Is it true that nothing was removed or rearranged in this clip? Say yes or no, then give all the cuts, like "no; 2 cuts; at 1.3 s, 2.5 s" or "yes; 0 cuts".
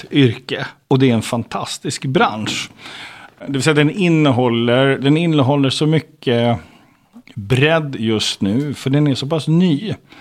yes; 0 cuts